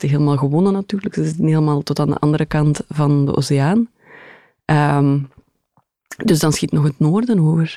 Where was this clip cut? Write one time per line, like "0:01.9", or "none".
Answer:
none